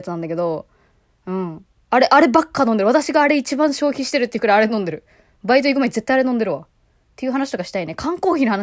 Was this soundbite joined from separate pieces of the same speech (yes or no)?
no